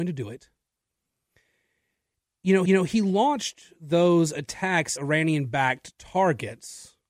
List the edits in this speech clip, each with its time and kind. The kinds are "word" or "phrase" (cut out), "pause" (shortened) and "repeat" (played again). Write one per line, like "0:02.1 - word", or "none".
0:02.7 - repeat
0:05.0 - word